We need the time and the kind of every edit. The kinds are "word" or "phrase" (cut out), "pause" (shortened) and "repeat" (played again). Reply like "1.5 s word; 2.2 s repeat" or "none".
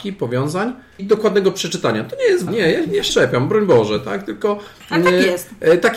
1.0 s word; 2.5 s word; 3.1 s word

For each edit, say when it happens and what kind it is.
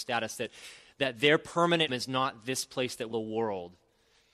1.9 s word; 3.1 s phrase

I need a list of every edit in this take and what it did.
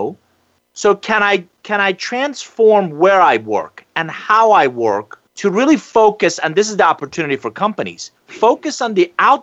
5.3 s pause; 8.2 s pause

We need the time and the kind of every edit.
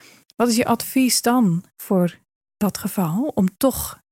1.7 s pause

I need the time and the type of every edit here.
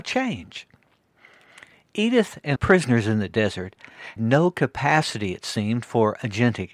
2.6 s word; 4.2 s word

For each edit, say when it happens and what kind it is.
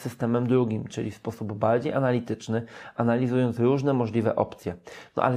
none

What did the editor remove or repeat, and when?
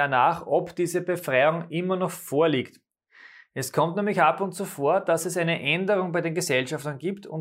none

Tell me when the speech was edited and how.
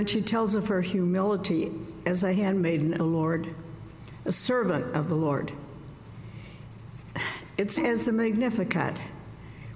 3.0 s word; 7.8 s word

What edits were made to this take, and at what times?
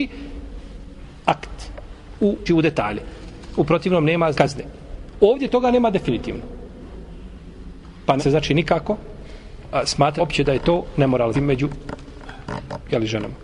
2.5 s word; 4.3 s word; 8.2 s word; 10.2 s word; 11.3 s word

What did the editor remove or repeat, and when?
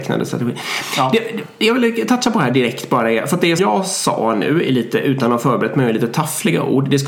3.6 s word

